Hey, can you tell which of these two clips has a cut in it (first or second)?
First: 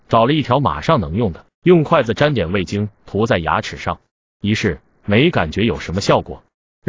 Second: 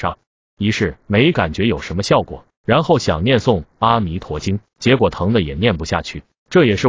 second